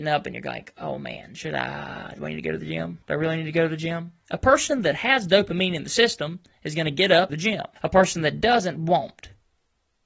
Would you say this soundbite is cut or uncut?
cut